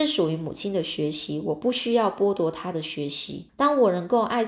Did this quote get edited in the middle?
yes; 1 cut; at 3.5 s

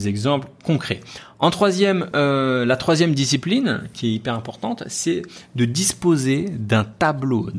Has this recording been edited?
no; 0 cuts

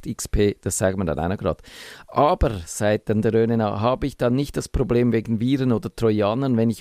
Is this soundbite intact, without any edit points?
yes; 0 cuts

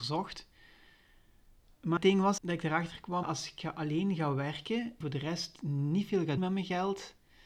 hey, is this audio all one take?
no; 5 cuts; at 2.0 s, 2.4 s, 3.2 s, 5.0 s, 6.4 s

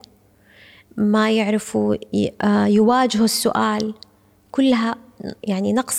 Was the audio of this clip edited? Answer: no; 0 cuts

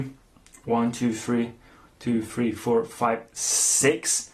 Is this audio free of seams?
yes; 0 cuts

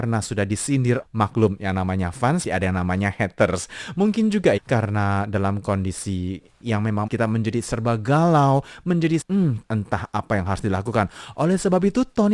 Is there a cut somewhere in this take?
yes; 7 cuts; at 1.0 s, 2.4 s, 4.6 s, 6.6 s, 7.1 s, 9.2 s, 9.6 s

